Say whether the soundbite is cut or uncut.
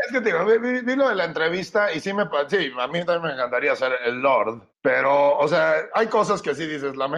cut